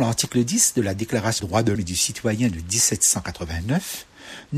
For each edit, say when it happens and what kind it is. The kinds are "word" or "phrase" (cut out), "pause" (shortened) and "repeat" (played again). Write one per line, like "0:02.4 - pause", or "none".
0:01.4 - word
0:01.7 - word